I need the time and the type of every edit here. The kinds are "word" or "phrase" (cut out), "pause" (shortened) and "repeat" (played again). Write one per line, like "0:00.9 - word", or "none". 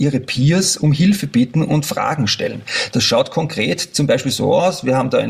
none